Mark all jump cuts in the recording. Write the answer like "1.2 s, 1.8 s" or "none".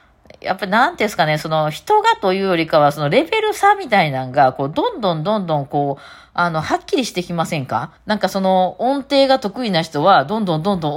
8.0 s

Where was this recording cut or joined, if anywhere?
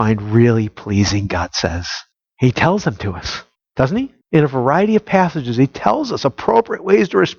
2.1 s, 3.6 s, 4.2 s

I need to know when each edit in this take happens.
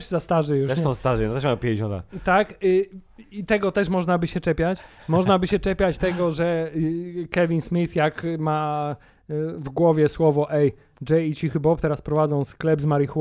none

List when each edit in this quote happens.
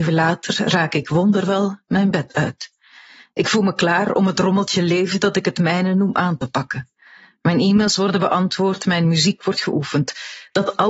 none

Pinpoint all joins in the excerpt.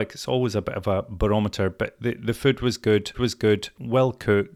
3.1 s

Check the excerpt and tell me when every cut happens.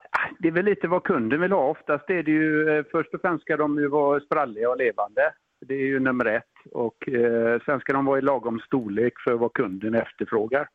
none

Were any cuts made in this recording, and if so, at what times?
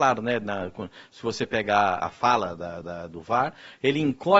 2.0 s, 2.8 s

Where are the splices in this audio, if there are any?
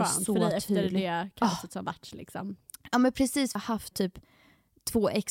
3.6 s, 3.9 s

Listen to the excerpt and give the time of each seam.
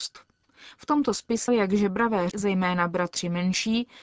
1.5 s, 2.3 s

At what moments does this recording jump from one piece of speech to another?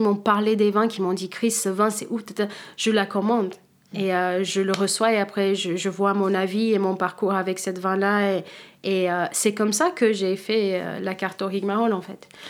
none

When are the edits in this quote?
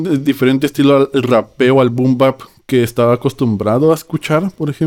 none

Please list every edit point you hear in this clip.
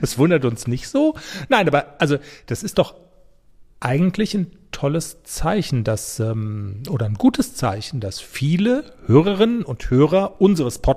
none

